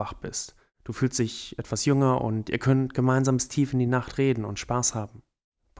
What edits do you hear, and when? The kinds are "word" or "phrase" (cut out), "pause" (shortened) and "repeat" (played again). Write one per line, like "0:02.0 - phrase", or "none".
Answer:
none